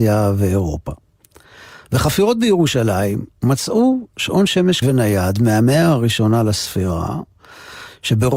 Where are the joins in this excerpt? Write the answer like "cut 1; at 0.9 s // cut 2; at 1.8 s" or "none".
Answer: cut 1; at 4.8 s